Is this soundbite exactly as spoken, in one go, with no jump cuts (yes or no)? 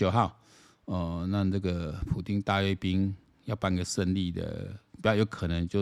yes